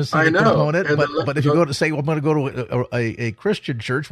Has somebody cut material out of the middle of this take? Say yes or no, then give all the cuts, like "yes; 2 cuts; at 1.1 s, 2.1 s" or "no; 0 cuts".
no; 0 cuts